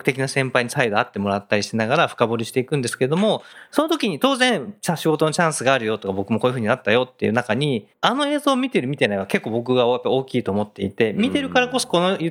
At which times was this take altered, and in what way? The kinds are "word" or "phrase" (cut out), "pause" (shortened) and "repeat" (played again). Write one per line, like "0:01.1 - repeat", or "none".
0:07.9 - pause